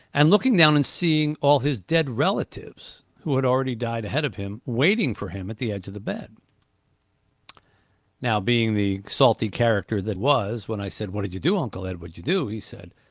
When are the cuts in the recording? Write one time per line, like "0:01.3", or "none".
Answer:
0:10.2

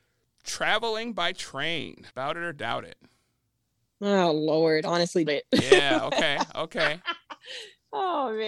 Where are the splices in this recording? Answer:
0:02.1
0:05.3

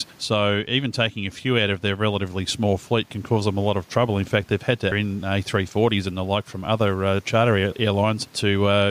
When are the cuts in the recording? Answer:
0:04.9

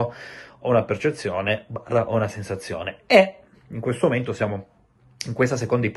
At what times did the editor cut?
none

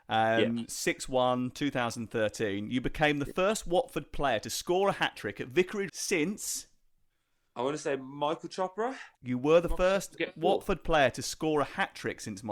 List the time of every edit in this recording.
0:05.9
0:09.1

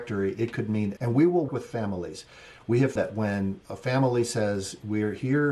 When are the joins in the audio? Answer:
0:01.0
0:01.5
0:03.0

